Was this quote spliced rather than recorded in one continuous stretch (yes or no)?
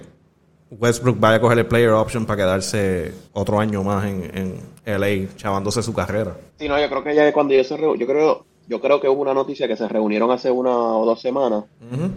yes